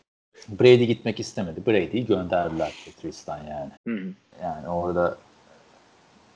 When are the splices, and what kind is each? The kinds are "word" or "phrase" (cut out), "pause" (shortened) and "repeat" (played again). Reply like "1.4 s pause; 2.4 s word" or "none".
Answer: 3.8 s pause; 4.3 s pause